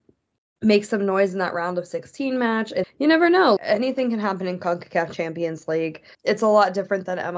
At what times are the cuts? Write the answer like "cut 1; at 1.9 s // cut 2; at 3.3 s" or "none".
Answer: cut 1; at 2.8 s // cut 2; at 3.6 s // cut 3; at 6.1 s